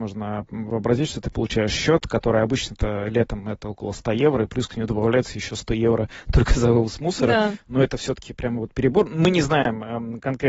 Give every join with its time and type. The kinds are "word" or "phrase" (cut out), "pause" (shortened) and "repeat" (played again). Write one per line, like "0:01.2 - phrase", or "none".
none